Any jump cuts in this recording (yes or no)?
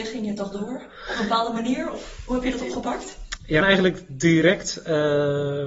yes